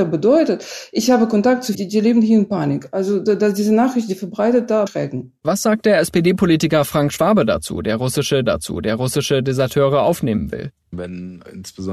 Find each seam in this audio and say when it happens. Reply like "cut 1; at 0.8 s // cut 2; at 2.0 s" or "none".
cut 1; at 1.7 s // cut 2; at 4.9 s // cut 3; at 8.5 s